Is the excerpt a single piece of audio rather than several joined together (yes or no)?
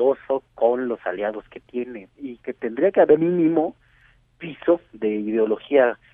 no